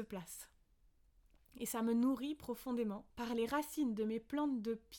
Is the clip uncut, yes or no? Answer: no